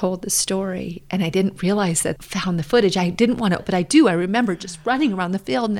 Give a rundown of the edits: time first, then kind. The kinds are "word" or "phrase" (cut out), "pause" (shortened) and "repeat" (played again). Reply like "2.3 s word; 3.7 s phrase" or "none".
2.2 s word; 3.6 s word